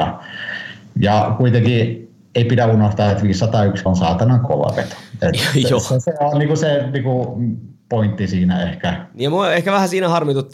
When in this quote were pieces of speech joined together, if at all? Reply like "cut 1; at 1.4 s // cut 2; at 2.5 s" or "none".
cut 1; at 3.9 s